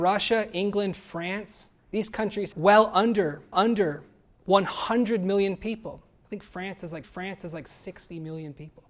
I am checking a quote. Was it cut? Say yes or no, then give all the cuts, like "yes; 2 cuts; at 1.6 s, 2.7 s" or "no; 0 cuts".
yes; 3 cuts; at 2.5 s, 3.5 s, 7.0 s